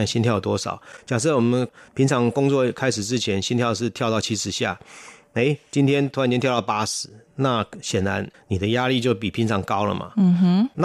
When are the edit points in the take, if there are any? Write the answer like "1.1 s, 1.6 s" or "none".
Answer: none

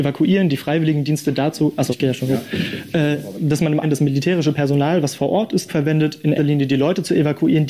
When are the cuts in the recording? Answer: 1.9 s, 3.8 s, 5.7 s, 6.4 s

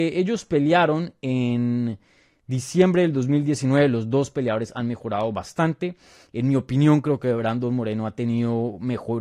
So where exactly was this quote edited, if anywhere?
none

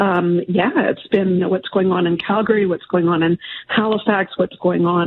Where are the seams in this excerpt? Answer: 1.4 s

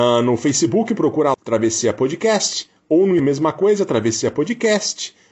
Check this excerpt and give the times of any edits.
1.3 s, 3.2 s

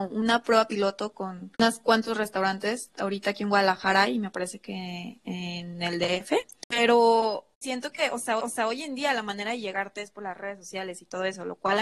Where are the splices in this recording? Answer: 1.5 s, 7.5 s, 8.4 s

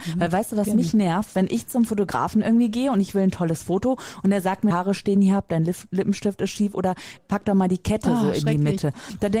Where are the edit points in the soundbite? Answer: 4.7 s, 7.2 s

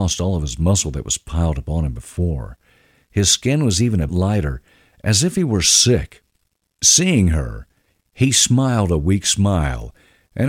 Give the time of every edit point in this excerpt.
4.1 s

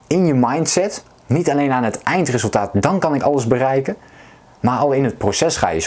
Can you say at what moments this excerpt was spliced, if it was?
none

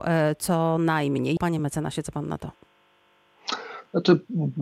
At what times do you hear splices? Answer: none

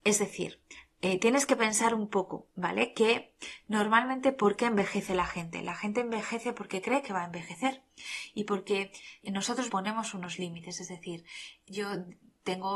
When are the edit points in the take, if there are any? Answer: 9.7 s

